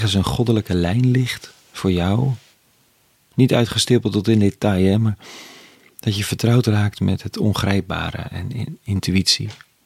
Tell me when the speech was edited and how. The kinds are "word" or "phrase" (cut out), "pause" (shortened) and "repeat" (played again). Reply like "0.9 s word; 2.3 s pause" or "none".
none